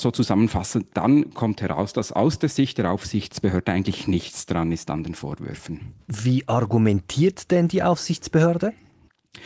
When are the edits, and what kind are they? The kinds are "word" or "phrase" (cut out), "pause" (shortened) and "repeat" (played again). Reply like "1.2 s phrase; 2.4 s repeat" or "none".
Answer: 6.0 s pause

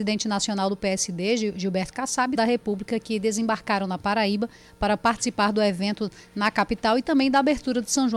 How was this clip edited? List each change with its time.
2.4 s phrase

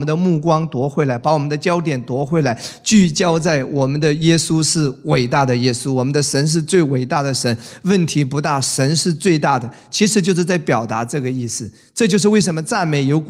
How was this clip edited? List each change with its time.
none

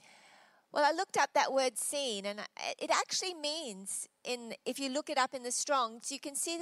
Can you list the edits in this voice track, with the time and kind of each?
none

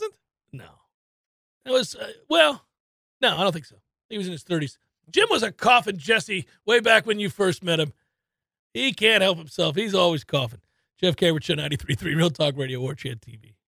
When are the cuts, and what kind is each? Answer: none

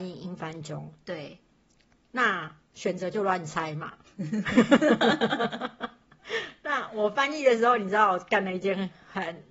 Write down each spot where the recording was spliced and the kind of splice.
none

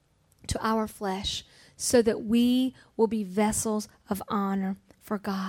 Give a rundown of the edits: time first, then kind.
none

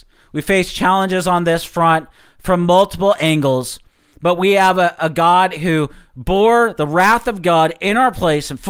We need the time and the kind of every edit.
none

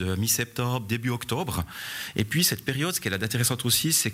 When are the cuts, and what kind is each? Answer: none

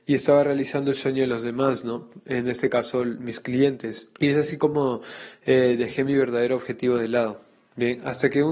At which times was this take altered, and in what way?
4.2 s pause

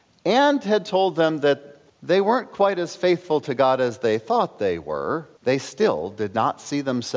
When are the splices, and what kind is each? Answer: 1.9 s pause; 5.4 s pause

